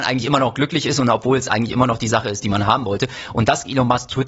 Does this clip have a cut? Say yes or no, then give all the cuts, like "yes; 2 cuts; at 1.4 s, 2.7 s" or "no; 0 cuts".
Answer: no; 0 cuts